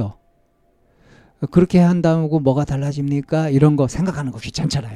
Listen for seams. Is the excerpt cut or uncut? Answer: uncut